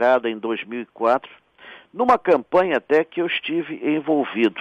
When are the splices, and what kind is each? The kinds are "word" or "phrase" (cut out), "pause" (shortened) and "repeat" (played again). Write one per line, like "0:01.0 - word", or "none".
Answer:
none